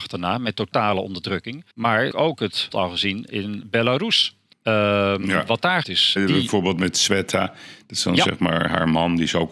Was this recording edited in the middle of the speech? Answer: yes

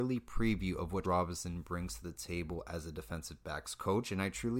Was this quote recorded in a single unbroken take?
no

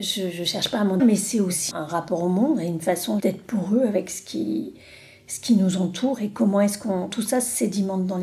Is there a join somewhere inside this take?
yes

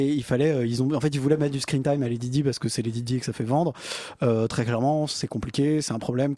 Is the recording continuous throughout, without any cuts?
yes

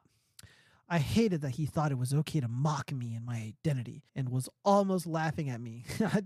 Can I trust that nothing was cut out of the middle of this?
no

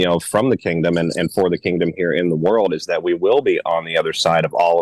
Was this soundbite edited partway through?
no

